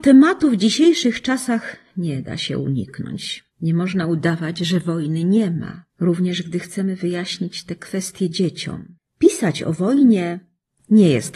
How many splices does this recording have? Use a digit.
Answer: 2